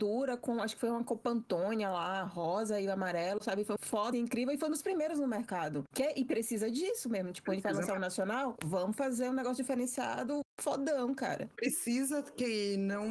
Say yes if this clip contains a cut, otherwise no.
yes